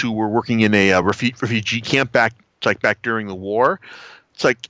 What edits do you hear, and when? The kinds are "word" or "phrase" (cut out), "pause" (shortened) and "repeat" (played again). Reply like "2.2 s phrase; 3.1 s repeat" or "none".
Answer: none